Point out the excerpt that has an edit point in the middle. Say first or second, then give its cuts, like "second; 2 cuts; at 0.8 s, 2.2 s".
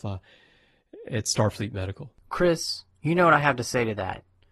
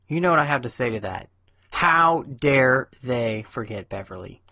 first; 1 cut; at 2.2 s